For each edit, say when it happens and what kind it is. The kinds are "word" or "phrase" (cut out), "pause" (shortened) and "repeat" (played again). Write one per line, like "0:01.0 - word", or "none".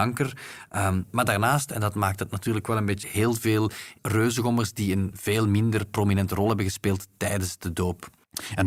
0:03.0 - word
0:04.0 - word